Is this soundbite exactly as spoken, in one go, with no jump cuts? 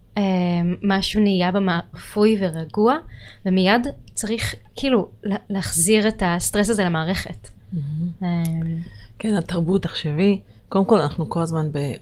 no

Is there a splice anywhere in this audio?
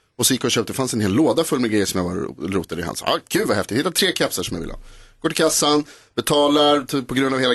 no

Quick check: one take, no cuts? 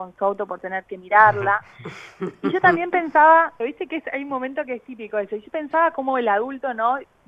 no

